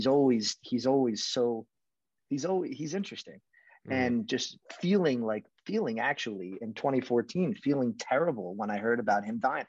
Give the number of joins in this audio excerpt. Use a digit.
0